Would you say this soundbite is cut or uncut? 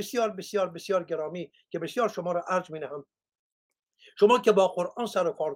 uncut